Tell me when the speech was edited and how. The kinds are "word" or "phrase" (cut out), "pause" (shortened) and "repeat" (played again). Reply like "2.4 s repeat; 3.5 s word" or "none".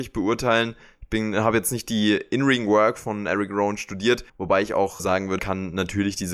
4.3 s pause; 5.0 s word; 5.4 s word

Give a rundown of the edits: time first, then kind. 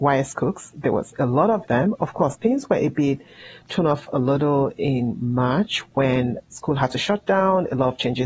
1.7 s phrase; 6.5 s word

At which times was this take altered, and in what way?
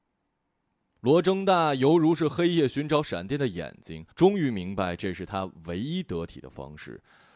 4.1 s pause

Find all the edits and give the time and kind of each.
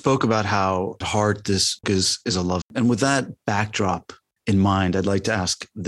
1.0 s word; 1.8 s word; 2.6 s word; 4.4 s pause

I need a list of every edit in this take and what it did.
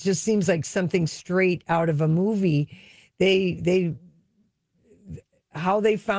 none

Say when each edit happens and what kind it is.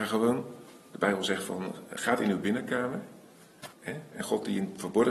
3.7 s pause

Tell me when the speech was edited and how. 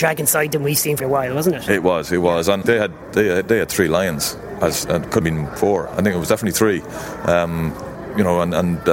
1.0 s word; 2.6 s word; 5.2 s word

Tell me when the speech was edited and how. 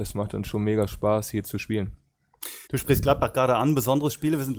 2.7 s pause

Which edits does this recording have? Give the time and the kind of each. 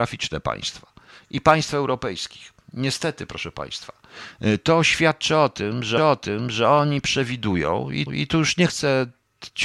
6.0 s repeat; 8.1 s repeat

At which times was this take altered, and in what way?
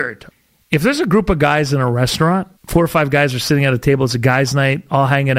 2.6 s pause

